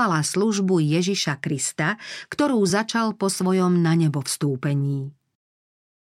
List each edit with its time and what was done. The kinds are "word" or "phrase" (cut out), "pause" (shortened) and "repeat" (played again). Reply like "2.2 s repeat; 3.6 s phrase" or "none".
none